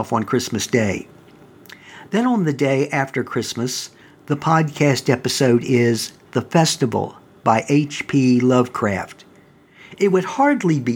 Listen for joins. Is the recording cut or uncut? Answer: uncut